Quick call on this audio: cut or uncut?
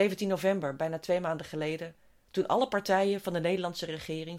uncut